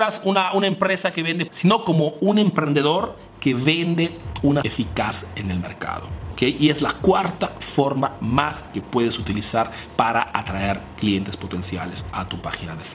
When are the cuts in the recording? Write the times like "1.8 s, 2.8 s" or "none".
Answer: 1.5 s, 4.6 s, 8.7 s

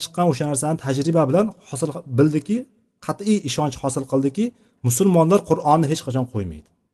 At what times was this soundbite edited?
none

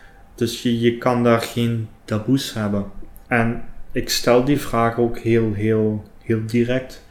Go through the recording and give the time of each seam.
2.0 s

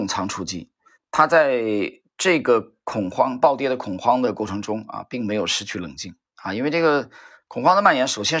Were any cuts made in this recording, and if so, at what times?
0.9 s, 6.2 s

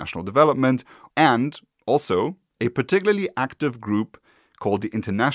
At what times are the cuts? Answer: none

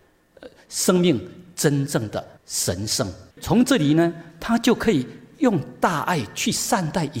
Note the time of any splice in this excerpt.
2.4 s, 3.3 s

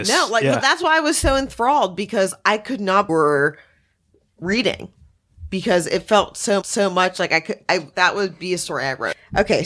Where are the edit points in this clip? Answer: 3.1 s, 6.6 s, 7.9 s

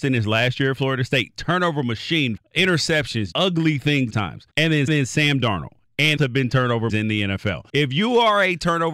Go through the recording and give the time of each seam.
2.4 s, 3.3 s, 4.1 s, 4.5 s, 4.9 s, 6.2 s, 6.9 s, 7.7 s

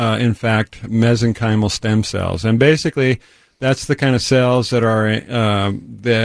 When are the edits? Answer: none

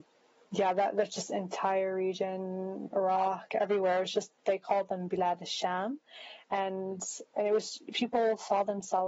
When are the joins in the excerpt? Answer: 2.9 s, 7.3 s

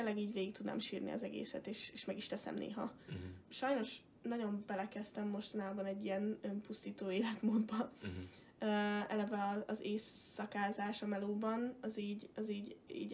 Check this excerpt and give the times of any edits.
none

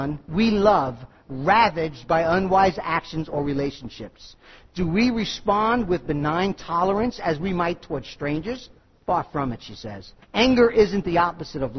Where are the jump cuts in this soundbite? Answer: 10.2 s

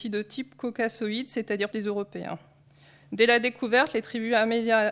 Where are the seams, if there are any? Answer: 1.7 s

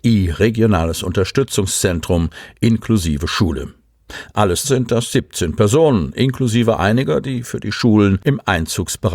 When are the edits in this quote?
4.6 s

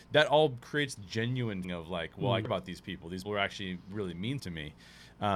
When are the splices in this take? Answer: 1.0 s, 1.6 s, 2.4 s, 3.2 s, 4.4 s

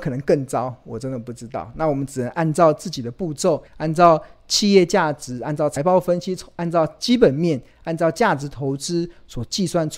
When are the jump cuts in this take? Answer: 3.7 s

